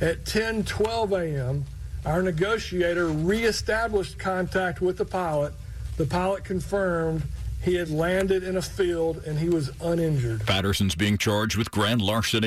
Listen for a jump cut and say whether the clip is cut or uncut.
uncut